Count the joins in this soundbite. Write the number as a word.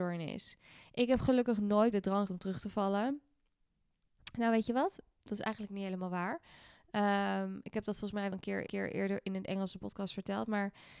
four